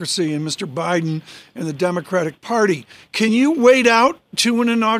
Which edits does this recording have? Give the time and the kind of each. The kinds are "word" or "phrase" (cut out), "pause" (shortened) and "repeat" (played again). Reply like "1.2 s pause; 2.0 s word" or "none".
none